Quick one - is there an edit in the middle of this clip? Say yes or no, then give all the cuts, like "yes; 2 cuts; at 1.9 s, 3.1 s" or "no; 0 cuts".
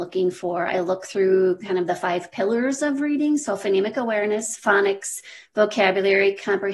no; 0 cuts